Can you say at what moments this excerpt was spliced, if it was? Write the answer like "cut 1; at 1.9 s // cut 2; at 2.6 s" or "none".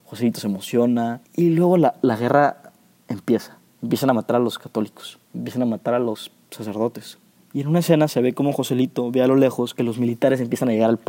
cut 1; at 1.2 s // cut 2; at 3.7 s // cut 3; at 5.2 s // cut 4; at 7.4 s